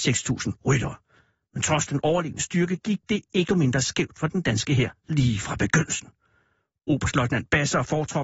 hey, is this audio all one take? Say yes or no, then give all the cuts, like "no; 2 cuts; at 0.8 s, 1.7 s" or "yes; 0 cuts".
no; 1 cut; at 3.5 s